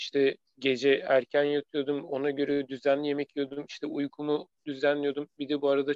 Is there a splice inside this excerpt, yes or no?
no